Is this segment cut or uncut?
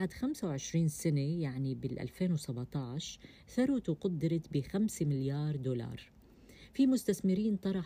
uncut